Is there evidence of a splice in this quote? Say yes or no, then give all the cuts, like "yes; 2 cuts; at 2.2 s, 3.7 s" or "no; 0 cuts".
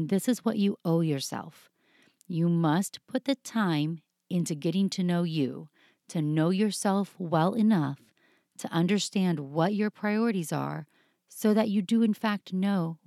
no; 0 cuts